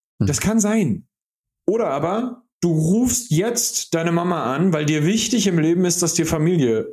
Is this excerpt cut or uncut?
cut